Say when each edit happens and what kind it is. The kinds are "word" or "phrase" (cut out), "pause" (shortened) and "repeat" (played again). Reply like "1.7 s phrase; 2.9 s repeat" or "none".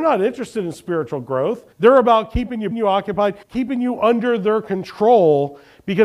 1.7 s pause; 2.7 s phrase; 3.4 s pause